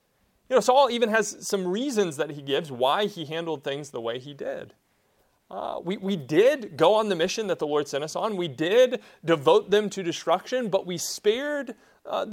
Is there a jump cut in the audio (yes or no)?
no